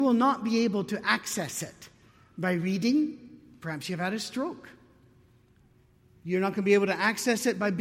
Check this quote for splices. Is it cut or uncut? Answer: uncut